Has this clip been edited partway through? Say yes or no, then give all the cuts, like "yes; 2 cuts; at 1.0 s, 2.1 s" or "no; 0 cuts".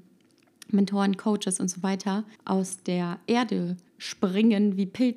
yes; 2 cuts; at 2.4 s, 3.9 s